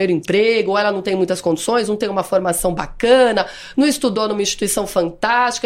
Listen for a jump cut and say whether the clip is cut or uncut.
uncut